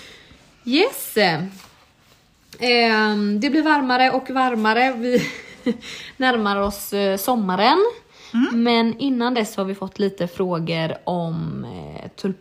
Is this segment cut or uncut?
uncut